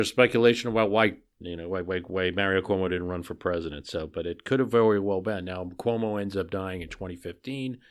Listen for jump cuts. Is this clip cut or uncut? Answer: uncut